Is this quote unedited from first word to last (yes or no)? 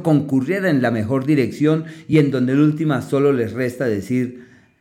yes